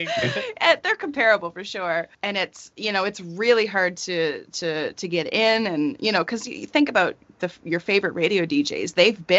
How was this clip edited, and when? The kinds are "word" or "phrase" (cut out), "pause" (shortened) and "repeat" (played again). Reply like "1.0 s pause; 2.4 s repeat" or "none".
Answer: 2.1 s pause